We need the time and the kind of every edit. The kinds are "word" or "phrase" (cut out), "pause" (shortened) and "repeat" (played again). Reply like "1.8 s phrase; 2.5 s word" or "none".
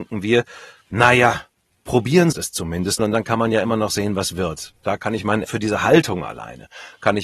2.3 s word; 3.0 s word; 5.4 s word